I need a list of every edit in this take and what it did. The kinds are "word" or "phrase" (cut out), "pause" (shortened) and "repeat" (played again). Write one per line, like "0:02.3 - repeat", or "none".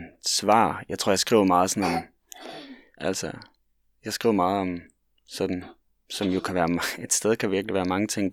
0:03.0 - word